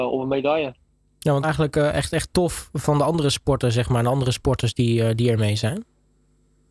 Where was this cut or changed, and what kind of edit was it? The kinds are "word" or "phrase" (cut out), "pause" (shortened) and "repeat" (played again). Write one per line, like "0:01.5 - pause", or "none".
0:01.4 - phrase